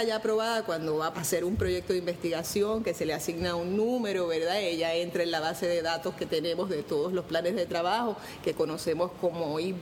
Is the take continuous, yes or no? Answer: no